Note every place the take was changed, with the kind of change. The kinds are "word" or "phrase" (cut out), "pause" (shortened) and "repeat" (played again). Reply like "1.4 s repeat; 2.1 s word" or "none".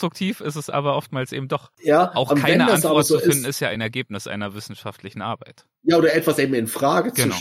none